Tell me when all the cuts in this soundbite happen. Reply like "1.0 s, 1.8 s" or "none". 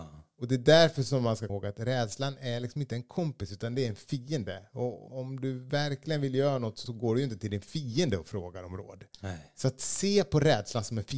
1.5 s, 5.1 s, 6.9 s